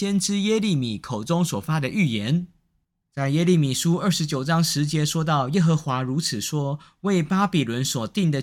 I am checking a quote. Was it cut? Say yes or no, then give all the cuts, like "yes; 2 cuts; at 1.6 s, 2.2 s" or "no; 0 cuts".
no; 0 cuts